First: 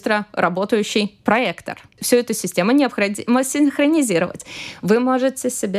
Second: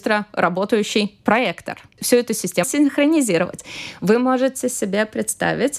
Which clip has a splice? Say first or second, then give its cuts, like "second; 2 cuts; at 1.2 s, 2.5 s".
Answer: second; 1 cut; at 2.6 s